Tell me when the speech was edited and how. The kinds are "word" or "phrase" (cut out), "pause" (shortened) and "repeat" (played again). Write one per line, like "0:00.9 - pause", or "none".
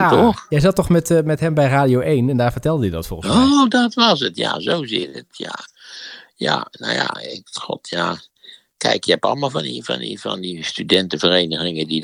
none